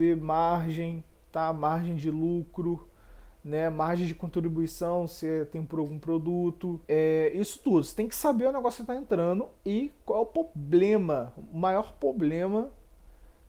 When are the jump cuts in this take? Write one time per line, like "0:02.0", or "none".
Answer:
0:06.8